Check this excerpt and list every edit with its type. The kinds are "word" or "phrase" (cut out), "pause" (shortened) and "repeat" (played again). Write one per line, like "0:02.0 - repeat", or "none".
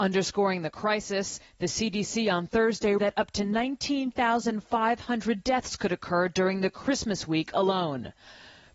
0:03.0 - word